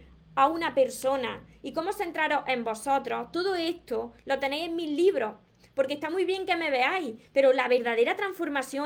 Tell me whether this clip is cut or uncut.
uncut